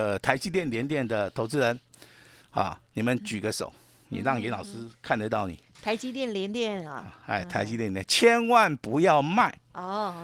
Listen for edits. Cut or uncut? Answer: uncut